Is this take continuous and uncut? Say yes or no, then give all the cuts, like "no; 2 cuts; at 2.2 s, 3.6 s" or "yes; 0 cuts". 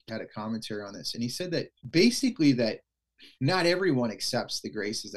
no; 2 cuts; at 1.8 s, 3.3 s